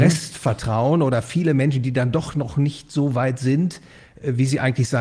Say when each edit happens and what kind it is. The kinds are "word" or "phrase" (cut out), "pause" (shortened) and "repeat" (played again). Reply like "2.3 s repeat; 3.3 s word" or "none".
none